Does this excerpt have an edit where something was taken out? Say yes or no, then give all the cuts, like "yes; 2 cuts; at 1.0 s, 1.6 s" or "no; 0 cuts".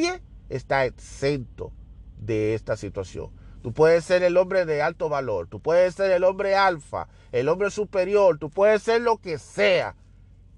no; 0 cuts